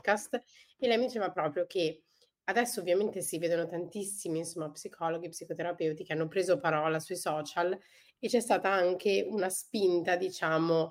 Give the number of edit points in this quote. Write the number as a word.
zero